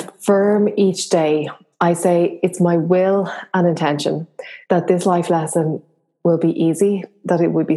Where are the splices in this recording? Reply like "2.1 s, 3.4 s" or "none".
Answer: 1.7 s, 4.6 s